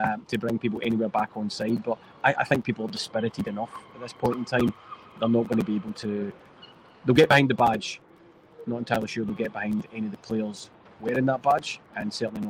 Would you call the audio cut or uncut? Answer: uncut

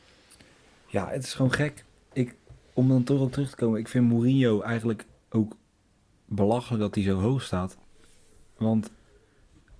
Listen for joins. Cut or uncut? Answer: uncut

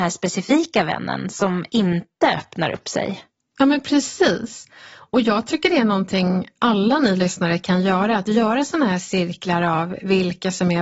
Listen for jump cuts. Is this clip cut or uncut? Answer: uncut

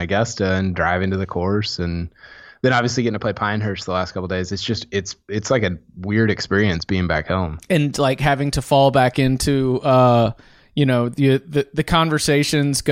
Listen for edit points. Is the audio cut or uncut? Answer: uncut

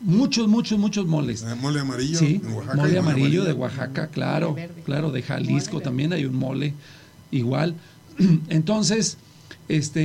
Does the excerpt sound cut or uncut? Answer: uncut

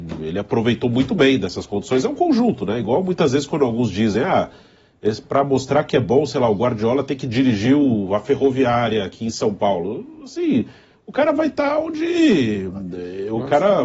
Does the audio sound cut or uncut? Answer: uncut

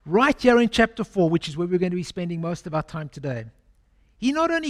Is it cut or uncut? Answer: uncut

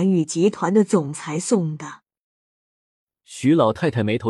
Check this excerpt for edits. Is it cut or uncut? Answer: uncut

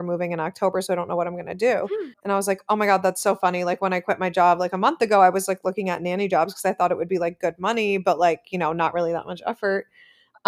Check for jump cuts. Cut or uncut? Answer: cut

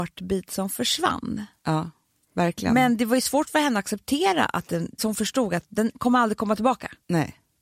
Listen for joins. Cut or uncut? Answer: cut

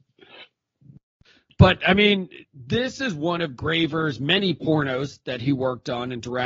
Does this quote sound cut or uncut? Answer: uncut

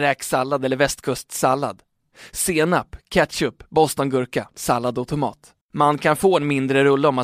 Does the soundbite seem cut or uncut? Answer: cut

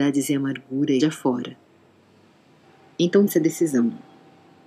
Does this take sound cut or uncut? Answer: cut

